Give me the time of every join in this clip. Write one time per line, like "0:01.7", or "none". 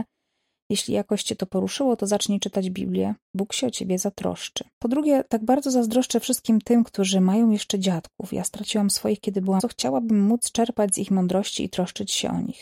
0:04.7
0:09.6